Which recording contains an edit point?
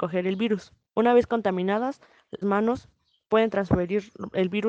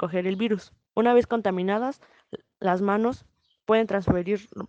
first; 1 cut; at 2.4 s

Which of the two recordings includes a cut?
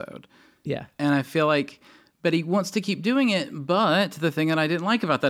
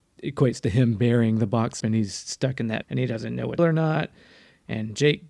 second; 3 cuts; at 1.8 s, 2.8 s, 3.6 s

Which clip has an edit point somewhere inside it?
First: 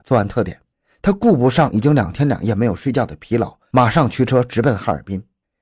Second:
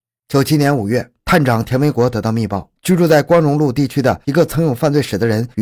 second; 1 cut; at 2.8 s

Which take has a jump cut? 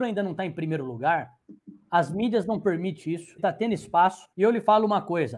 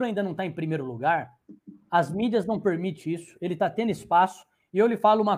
first; 2 cuts; at 3.4 s, 4.3 s

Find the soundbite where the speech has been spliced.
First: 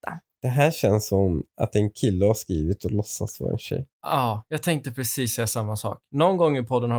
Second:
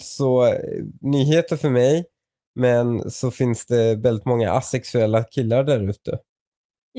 first; 1 cut; at 3.9 s

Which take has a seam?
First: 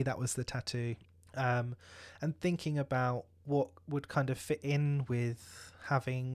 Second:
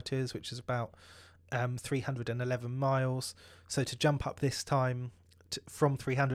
first; 1 cut; at 1.1 s

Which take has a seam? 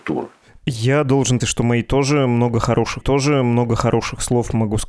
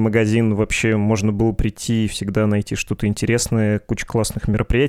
first; 2 cuts; at 1.4 s, 3.0 s

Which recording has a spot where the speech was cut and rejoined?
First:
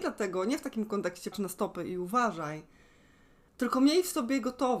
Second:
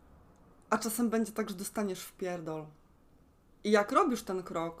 first; 1 cut; at 1.3 s

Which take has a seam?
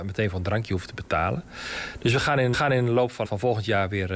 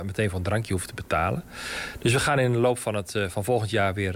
first; 2 cuts; at 2.5 s, 3.2 s

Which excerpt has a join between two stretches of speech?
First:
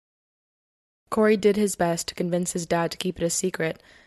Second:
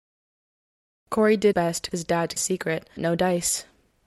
second; 4 cuts; at 1.5 s, 1.9 s, 2.4 s, 3.0 s

